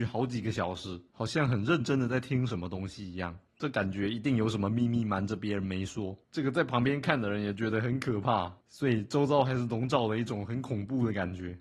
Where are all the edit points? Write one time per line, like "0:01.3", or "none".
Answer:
0:01.1
0:03.5
0:06.2
0:08.6